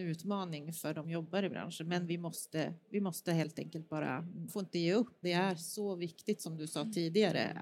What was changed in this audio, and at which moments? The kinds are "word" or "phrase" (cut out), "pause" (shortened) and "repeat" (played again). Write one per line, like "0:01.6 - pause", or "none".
0:01.0 - word
0:04.5 - word
0:05.2 - word